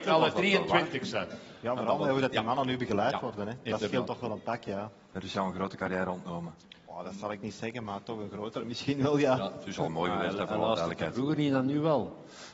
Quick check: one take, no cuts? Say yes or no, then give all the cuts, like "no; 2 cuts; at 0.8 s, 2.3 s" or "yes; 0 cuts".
yes; 0 cuts